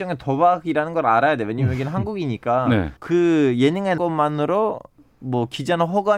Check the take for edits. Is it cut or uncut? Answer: cut